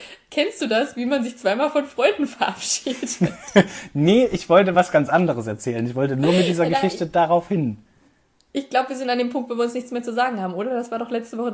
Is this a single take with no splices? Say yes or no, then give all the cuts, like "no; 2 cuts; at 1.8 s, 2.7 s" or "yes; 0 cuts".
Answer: yes; 0 cuts